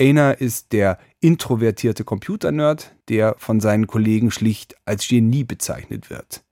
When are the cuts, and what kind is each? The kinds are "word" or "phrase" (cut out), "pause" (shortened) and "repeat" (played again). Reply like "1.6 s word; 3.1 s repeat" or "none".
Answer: 3.0 s pause